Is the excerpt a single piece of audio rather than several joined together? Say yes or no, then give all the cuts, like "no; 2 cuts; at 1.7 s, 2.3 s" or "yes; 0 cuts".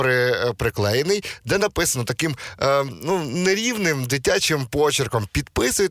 yes; 0 cuts